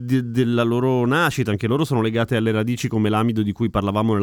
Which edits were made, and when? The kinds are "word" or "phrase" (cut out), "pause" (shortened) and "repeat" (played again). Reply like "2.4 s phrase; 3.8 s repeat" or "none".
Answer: none

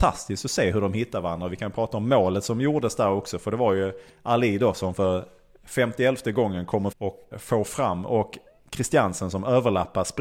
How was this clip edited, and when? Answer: 6.9 s word; 7.3 s word

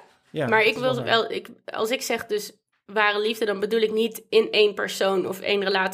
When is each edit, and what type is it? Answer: none

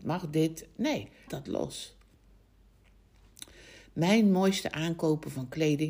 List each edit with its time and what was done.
1.3 s word

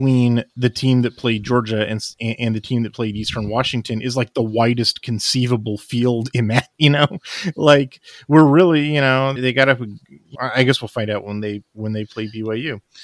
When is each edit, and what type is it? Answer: 9.4 s word; 10.3 s word

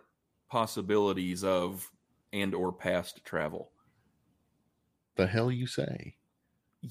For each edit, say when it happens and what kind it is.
2.2 s word

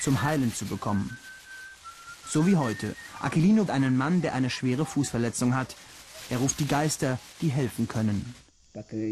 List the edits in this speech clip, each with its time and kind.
3.7 s word

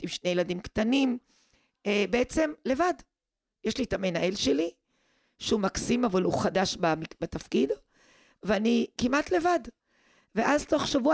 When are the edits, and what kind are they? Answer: none

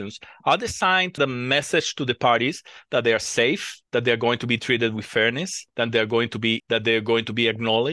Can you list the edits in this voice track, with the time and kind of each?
1.2 s word; 3.9 s pause; 5.7 s pause; 6.6 s word

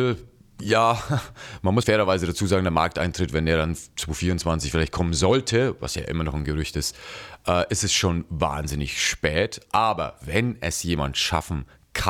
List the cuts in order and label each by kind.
1.8 s word

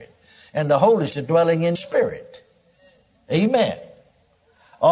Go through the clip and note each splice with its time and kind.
1.1 s word; 1.7 s word

